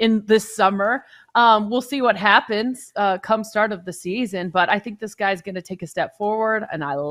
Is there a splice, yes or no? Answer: no